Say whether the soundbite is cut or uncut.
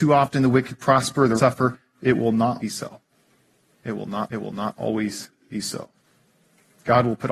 cut